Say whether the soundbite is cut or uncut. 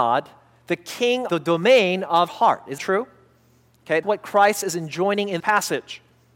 cut